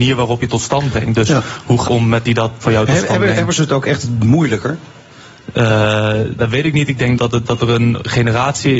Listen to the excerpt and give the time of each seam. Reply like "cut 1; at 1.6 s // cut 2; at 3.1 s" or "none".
cut 1; at 1.9 s // cut 2; at 2.2 s // cut 3; at 2.6 s // cut 4; at 3.6 s // cut 5; at 6.4 s // cut 6; at 7.2 s

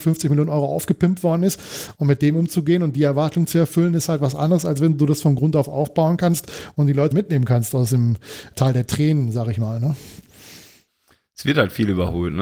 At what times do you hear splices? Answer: cut 1; at 7.1 s // cut 2; at 8.5 s

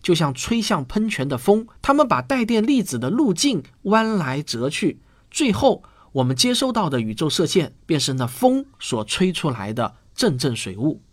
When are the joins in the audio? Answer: cut 1; at 1.8 s // cut 2; at 7.8 s

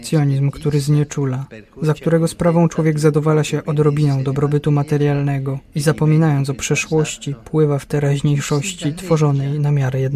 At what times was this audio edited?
none

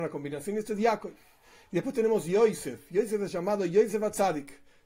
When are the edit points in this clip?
none

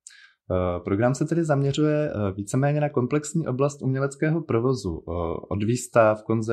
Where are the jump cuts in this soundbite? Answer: none

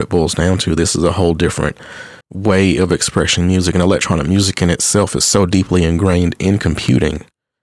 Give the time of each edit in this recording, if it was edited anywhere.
cut 1; at 2.2 s

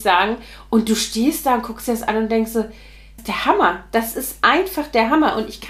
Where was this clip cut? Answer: cut 1; at 3.2 s

